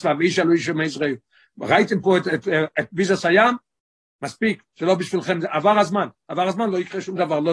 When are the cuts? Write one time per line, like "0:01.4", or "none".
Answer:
none